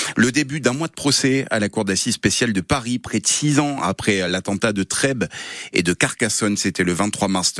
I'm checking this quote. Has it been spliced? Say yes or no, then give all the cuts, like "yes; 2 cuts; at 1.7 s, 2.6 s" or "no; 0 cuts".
no; 0 cuts